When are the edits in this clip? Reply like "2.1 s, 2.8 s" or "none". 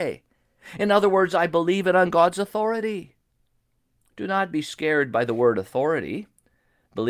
none